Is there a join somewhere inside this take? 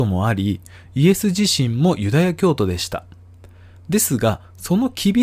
no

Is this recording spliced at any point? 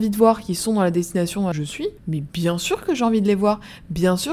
yes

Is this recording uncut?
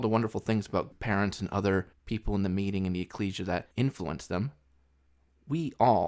no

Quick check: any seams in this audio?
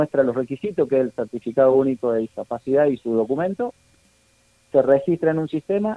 no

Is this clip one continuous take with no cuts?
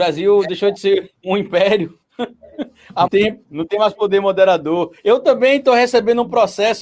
no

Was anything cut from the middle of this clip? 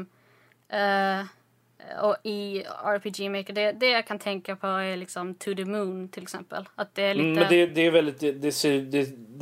no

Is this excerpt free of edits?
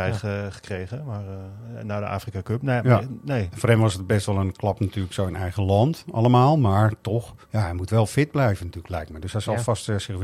no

